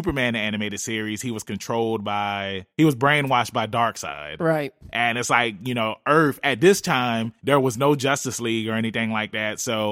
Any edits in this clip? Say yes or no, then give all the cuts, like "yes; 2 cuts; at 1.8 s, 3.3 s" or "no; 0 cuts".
yes; 2 cuts; at 2.7 s, 7.4 s